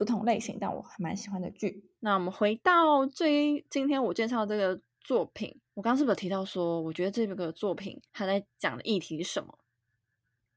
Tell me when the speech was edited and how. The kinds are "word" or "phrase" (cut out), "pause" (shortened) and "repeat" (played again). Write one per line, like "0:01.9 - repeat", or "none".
0:02.0 - pause
0:05.7 - pause
0:08.1 - pause